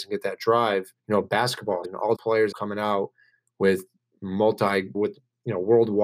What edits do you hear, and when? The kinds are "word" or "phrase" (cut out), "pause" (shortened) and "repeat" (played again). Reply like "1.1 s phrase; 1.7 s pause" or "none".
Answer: 1.0 s pause; 1.8 s word; 2.1 s word; 2.5 s phrase; 4.9 s word